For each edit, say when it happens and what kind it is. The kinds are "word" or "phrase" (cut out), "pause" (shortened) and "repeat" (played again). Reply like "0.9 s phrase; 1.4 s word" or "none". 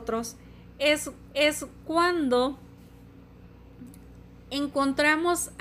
1.3 s repeat